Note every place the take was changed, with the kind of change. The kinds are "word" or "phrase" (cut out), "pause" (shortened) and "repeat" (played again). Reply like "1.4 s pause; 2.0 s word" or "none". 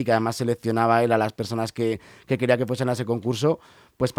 none